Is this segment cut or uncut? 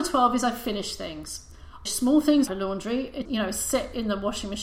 cut